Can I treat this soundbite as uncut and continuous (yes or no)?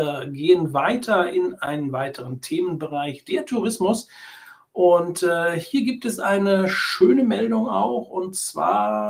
yes